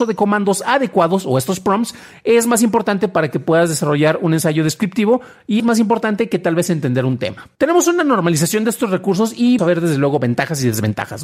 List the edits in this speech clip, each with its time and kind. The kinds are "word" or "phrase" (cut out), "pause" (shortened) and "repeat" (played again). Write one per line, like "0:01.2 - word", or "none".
0:05.6 - word
0:07.5 - pause
0:09.6 - word